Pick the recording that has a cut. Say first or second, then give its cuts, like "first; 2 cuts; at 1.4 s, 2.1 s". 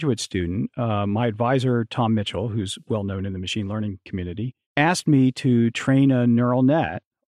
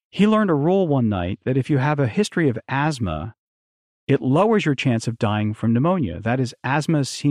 first; 1 cut; at 4.6 s